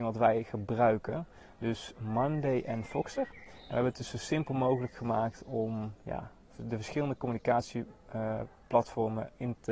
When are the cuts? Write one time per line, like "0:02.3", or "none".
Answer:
none